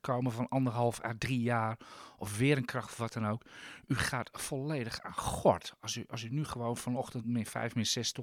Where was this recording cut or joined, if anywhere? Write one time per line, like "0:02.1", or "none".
none